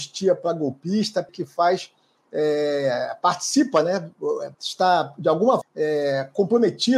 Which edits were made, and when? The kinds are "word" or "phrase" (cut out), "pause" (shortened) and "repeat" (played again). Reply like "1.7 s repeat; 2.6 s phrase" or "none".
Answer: 1.3 s word; 4.5 s pause; 5.6 s word